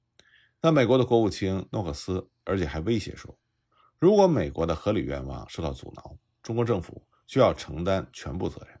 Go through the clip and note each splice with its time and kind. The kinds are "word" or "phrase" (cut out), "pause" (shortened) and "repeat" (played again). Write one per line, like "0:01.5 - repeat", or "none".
none

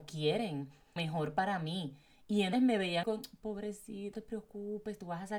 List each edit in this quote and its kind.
0:01.0 - word
0:02.5 - word
0:03.0 - word
0:04.1 - word

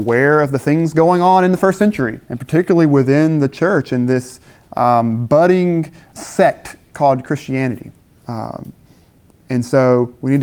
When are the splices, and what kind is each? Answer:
0:02.2 - pause
0:06.1 - word
0:08.0 - pause

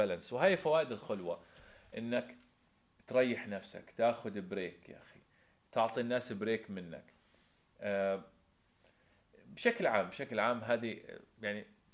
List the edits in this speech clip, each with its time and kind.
none

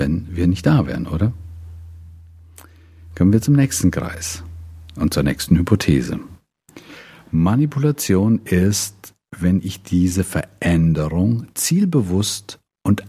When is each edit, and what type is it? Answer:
none

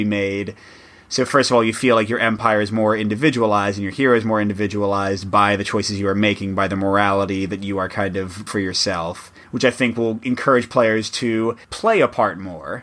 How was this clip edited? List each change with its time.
0:08.5 - word

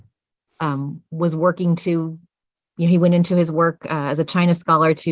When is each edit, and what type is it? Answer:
none

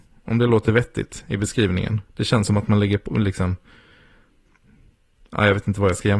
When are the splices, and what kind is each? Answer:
0:02.1 - pause

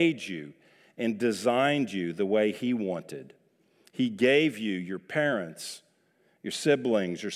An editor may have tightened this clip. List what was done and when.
none

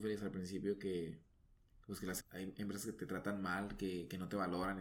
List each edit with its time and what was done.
0:02.2 - word

